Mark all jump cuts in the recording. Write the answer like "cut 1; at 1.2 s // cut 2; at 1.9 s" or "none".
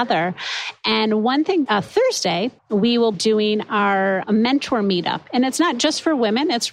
cut 1; at 1.7 s // cut 2; at 2.6 s // cut 3; at 3.1 s